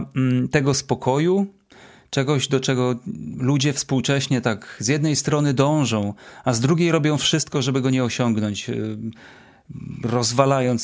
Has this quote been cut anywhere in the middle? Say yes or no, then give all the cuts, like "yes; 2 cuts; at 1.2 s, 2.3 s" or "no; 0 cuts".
no; 0 cuts